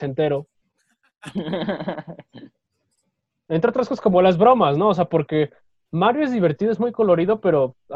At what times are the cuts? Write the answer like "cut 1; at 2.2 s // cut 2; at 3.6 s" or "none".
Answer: none

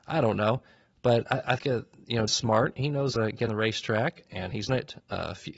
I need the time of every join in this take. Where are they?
cut 1; at 1.6 s // cut 2; at 2.3 s // cut 3; at 3.2 s // cut 4; at 3.5 s // cut 5; at 4.7 s

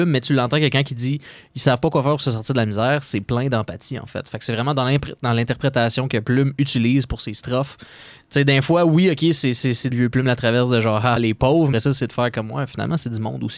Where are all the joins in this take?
cut 1; at 9.9 s // cut 2; at 11.2 s // cut 3; at 11.7 s

